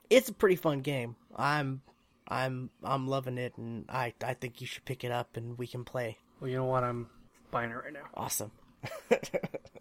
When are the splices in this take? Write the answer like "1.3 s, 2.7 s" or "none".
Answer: 6.3 s